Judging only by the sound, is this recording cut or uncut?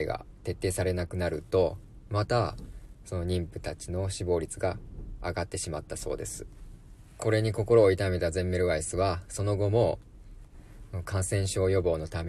uncut